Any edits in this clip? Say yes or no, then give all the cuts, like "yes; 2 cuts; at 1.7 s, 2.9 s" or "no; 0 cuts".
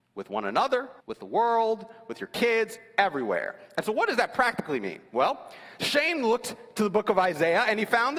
yes; 1 cut; at 1.0 s